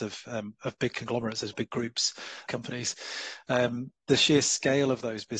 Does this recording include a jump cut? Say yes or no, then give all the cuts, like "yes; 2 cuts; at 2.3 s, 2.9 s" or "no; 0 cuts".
yes; 3 cuts; at 1.5 s, 2.5 s, 4.0 s